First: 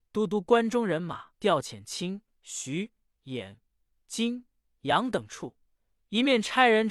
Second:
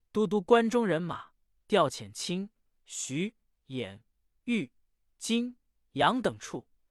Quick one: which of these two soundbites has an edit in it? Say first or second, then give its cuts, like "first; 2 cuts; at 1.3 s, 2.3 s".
first; 3 cuts; at 1.3 s, 2.3 s, 3.9 s